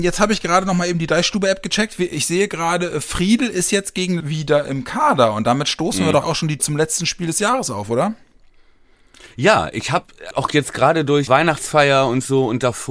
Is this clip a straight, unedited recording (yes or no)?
no